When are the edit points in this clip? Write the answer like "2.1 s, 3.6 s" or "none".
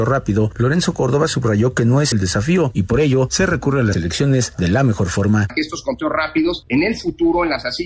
2.1 s, 3.9 s